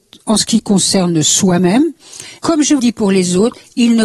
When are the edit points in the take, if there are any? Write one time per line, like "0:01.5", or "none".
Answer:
0:02.4
0:02.8